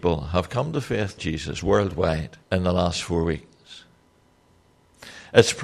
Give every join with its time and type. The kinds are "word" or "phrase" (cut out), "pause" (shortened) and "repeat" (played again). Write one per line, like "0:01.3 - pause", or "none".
0:01.2 - phrase
0:02.4 - pause